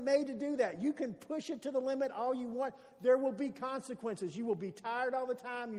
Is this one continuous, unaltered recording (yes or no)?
yes